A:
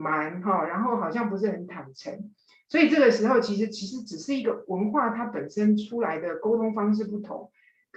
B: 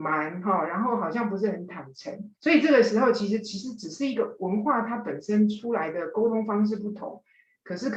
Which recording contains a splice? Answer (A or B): B